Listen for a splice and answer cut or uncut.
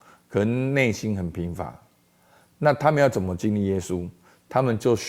uncut